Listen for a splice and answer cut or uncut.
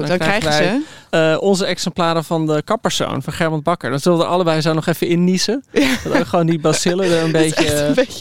cut